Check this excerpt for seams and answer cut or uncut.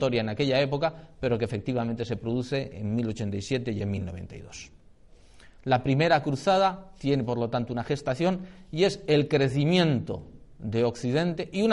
uncut